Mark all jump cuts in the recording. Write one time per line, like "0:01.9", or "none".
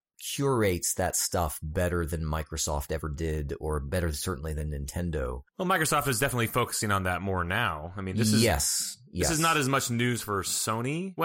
0:05.5